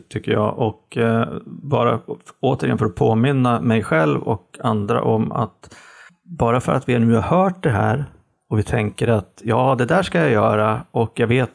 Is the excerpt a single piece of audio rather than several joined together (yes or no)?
yes